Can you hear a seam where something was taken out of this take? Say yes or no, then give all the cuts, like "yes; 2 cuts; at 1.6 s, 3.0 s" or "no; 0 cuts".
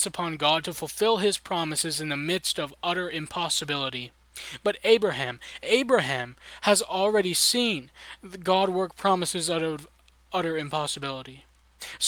no; 0 cuts